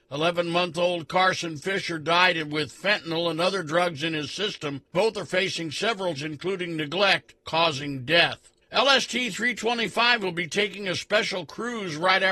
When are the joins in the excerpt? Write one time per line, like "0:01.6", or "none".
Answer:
0:04.9
0:06.2
0:07.4
0:08.6